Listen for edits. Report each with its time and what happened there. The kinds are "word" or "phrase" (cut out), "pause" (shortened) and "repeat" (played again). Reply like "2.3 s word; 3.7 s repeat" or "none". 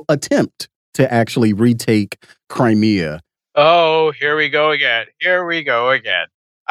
none